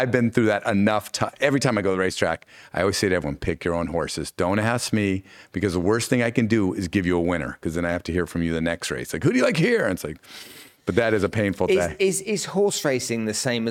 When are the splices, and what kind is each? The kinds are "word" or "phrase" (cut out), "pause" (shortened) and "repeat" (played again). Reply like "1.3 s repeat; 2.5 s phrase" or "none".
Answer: none